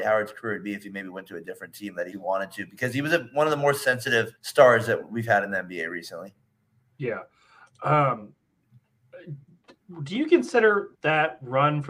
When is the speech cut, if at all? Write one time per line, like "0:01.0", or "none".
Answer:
0:02.1
0:04.4
0:10.9